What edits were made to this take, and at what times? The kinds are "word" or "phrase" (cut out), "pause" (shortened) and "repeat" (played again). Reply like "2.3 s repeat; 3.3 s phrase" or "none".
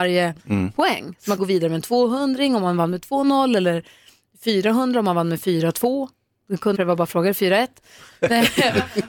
1.4 s word; 6.7 s phrase; 7.1 s word